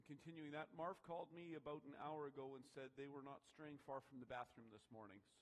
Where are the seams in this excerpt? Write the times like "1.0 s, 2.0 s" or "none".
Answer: none